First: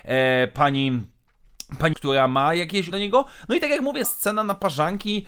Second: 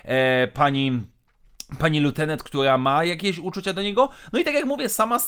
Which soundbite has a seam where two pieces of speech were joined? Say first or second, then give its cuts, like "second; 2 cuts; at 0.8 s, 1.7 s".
first; 3 cuts; at 1.9 s, 2.9 s, 4.0 s